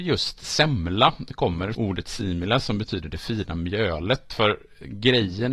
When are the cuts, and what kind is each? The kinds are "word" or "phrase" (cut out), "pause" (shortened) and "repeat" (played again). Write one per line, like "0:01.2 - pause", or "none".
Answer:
0:01.7 - phrase